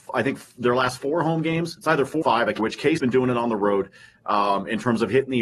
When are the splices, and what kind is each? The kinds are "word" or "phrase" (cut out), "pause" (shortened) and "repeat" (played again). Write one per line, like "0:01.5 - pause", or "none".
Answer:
0:02.2 - word
0:02.6 - word
0:03.0 - word